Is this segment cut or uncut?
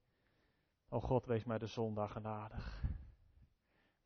uncut